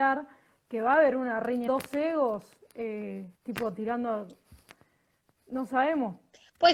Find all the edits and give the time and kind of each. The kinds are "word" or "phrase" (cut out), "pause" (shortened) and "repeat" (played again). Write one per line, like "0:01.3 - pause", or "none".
0:01.7 - phrase
0:03.3 - pause